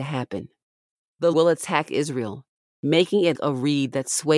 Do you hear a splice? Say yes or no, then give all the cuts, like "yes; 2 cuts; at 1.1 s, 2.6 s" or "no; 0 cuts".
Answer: yes; 2 cuts; at 1.3 s, 3.3 s